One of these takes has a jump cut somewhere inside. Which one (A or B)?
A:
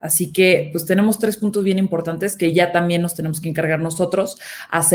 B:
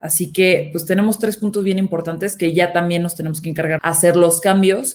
B